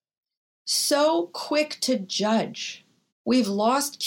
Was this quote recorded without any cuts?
no; 1 cut; at 3.1 s

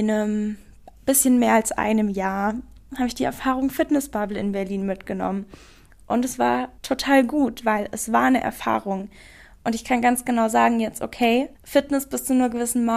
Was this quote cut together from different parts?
yes; 2 cuts; at 6.8 s, 11.5 s

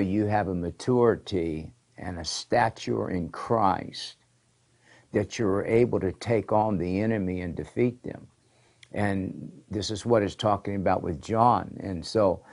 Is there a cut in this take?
no; 0 cuts

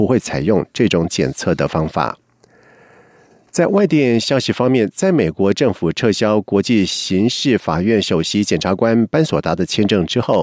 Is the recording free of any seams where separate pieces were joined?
yes; 0 cuts

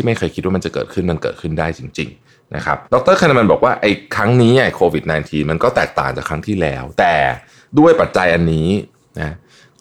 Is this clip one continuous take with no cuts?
no; 1 cut; at 2.9 s

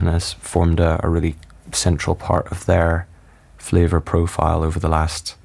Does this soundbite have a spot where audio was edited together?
no; 0 cuts

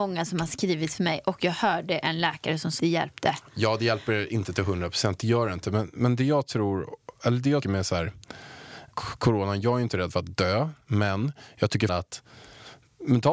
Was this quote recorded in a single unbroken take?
no; 4 cuts; at 2.8 s, 7.6 s, 8.9 s, 11.9 s

